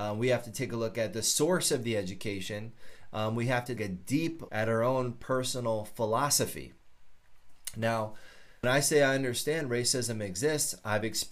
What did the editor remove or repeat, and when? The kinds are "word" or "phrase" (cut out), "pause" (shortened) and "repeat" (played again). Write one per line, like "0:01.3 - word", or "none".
0:03.8 - word
0:04.5 - word
0:08.6 - word